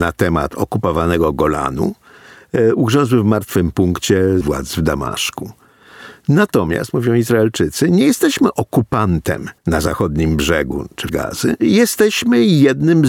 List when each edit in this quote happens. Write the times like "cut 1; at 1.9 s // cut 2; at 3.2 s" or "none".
cut 1; at 4.4 s // cut 2; at 9.6 s // cut 3; at 11.1 s

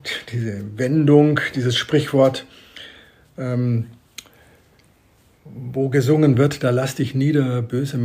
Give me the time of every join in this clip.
none

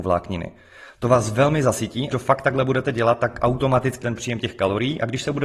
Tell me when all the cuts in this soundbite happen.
cut 1; at 2.1 s // cut 2; at 4.0 s

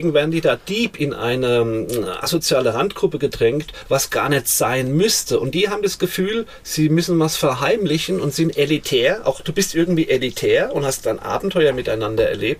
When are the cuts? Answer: none

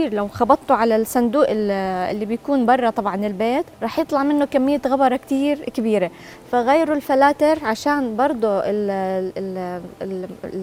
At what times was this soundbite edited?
cut 1; at 3.7 s

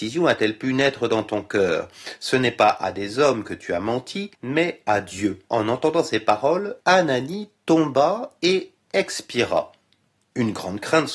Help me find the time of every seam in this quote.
cut 1; at 4.3 s // cut 2; at 5.5 s // cut 3; at 6.8 s

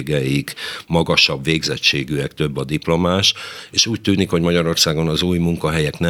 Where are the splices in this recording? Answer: none

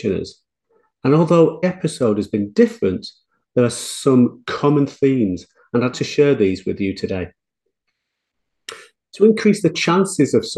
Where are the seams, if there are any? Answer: cut 1; at 1.6 s // cut 2; at 5.9 s

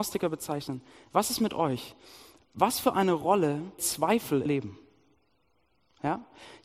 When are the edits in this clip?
cut 1; at 3.8 s // cut 2; at 4.5 s

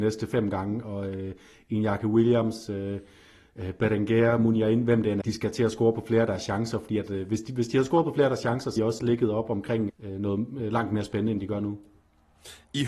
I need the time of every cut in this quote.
cut 1; at 5.2 s // cut 2; at 8.8 s // cut 3; at 9.9 s

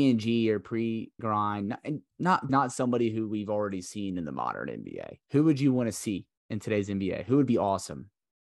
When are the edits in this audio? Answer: cut 1; at 1.2 s // cut 2; at 2.1 s // cut 3; at 2.5 s // cut 4; at 5.2 s // cut 5; at 6.4 s

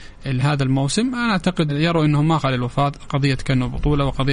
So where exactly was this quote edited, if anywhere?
cut 1; at 1.7 s // cut 2; at 2.4 s

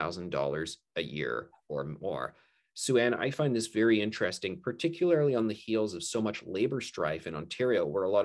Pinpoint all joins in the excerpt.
none

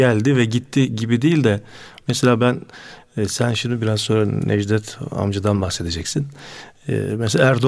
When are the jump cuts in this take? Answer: none

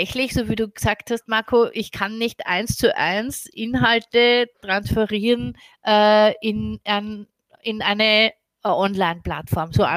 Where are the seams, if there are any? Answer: none

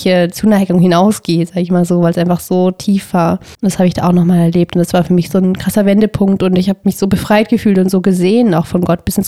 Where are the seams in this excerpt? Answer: cut 1; at 3.5 s

